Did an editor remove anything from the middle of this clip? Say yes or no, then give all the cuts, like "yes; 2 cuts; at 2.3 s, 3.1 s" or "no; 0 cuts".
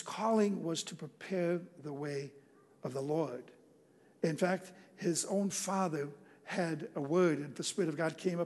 no; 0 cuts